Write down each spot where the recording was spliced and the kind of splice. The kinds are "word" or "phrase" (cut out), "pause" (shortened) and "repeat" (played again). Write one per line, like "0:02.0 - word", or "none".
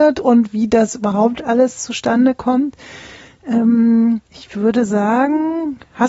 0:04.3 - pause